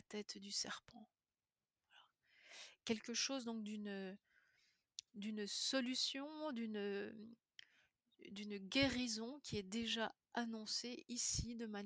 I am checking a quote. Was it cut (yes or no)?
yes